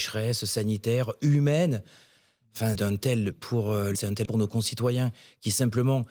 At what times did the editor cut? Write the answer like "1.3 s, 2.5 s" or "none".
2.7 s, 3.3 s, 3.9 s, 4.2 s